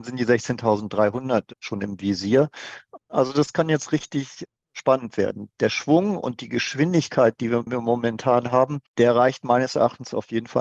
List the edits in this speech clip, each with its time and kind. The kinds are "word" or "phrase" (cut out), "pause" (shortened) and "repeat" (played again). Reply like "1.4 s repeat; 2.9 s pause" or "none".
8.9 s pause